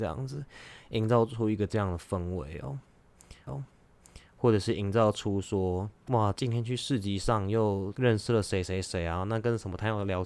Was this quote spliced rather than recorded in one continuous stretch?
yes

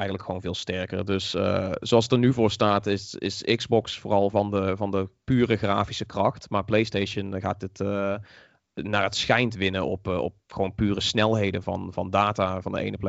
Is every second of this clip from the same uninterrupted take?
yes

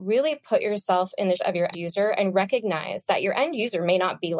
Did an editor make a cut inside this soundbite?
yes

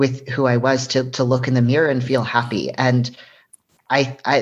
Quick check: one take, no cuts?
yes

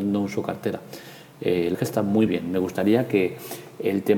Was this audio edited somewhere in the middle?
yes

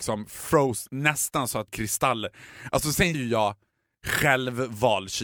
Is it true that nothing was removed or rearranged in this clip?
no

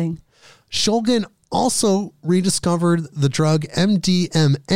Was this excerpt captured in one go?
yes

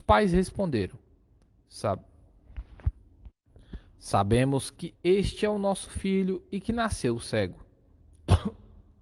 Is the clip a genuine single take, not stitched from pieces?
yes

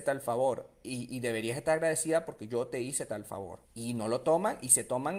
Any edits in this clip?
yes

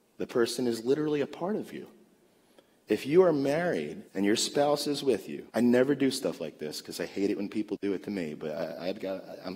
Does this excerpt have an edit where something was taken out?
yes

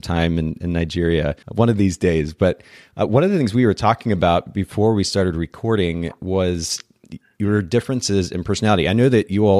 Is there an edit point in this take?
yes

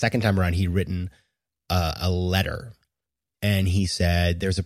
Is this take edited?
no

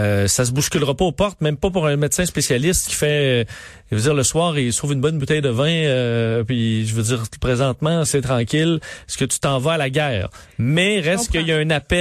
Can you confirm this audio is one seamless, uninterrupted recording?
no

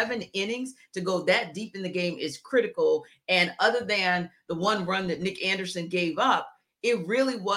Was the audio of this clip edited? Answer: no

